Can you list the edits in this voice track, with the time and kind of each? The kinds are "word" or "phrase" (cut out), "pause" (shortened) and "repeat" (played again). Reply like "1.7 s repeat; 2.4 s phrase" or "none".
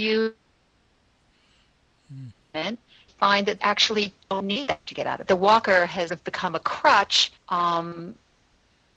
3.1 s word; 3.6 s word; 4.2 s pause; 4.9 s word; 5.3 s phrase; 6.1 s word; 7.4 s pause

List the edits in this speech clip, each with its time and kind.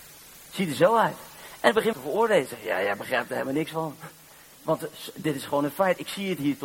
1.9 s word

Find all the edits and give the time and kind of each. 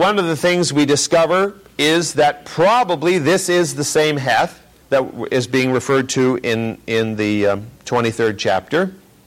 4.8 s pause

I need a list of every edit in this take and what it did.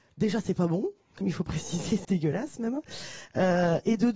1.2 s word; 2.0 s word

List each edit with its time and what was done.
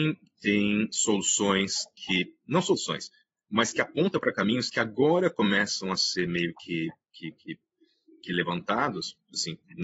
none

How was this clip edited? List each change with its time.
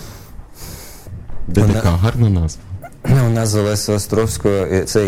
none

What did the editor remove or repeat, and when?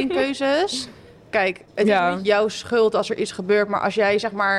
1.6 s pause

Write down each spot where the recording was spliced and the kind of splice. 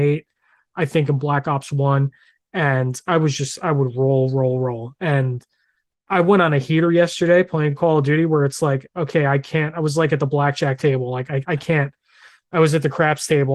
none

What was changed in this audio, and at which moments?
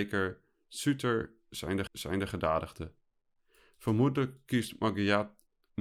1.9 s repeat

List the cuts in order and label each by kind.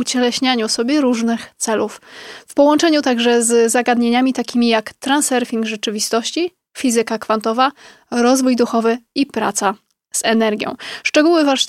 none

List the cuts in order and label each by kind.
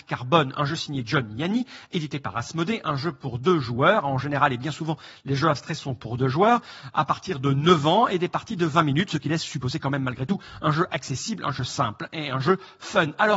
none

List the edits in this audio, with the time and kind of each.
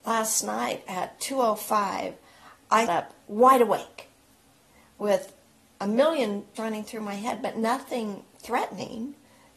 2.9 s word; 6.6 s word

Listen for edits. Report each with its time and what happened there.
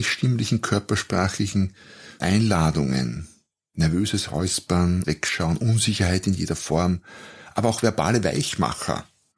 2.2 s word; 5.0 s word

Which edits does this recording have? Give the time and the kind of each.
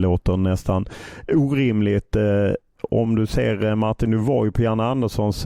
none

